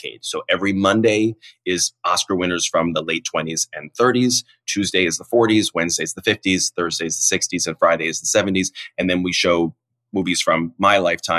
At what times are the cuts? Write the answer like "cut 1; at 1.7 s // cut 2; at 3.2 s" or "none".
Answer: none